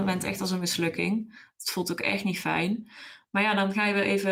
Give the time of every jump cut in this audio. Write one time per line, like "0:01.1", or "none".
none